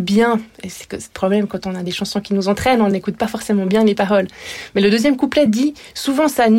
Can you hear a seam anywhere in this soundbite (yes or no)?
no